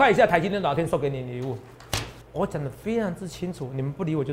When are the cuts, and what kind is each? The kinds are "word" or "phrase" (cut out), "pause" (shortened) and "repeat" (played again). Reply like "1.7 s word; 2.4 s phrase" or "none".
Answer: 2.2 s pause